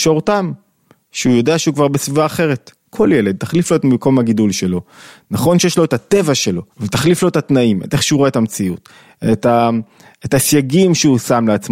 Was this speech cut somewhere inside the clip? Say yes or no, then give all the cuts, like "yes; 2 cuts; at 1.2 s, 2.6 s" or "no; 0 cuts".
yes; 1 cut; at 6.7 s